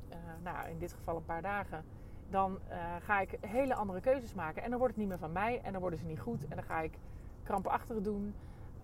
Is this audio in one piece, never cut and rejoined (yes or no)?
yes